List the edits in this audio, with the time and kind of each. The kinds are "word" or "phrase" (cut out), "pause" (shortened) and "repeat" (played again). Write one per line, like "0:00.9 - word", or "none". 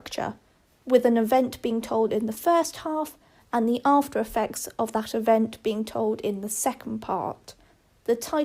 none